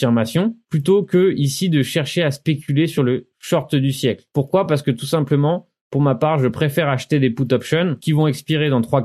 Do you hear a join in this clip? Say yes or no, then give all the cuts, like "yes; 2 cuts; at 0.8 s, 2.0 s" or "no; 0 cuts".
no; 0 cuts